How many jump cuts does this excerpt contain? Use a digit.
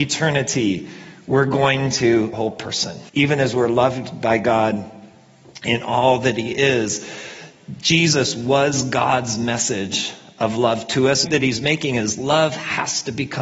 3